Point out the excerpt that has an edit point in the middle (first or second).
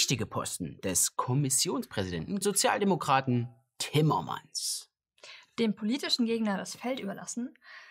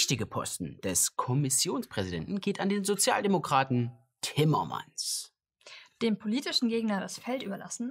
first